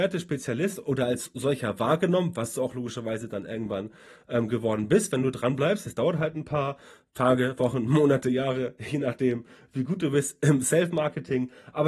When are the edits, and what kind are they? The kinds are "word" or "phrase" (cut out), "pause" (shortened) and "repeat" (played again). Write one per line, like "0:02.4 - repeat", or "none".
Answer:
none